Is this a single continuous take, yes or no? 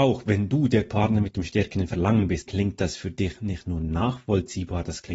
no